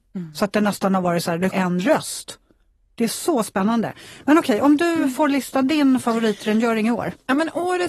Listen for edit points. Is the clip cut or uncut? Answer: cut